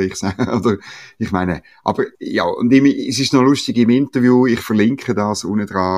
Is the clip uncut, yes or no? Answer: no